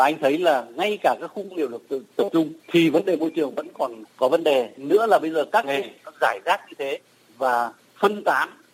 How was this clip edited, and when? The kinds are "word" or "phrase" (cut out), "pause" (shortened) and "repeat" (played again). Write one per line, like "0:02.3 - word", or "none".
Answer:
0:02.6 - pause
0:04.0 - word
0:05.6 - word